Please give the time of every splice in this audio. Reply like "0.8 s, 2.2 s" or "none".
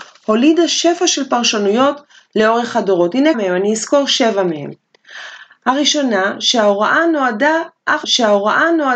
3.3 s, 8.0 s